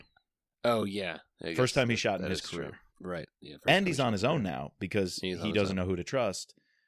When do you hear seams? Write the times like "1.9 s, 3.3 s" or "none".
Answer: 2.9 s